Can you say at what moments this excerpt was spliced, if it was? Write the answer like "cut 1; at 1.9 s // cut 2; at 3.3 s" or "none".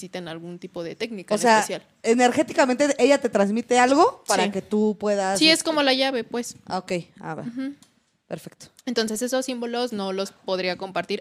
none